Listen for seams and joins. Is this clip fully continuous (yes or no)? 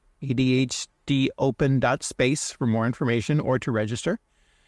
yes